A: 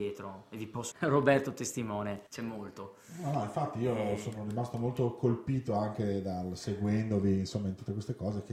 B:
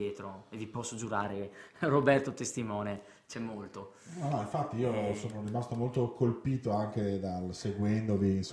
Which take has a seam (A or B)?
A